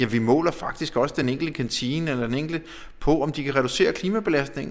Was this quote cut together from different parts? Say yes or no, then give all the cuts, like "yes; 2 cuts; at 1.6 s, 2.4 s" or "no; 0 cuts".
no; 0 cuts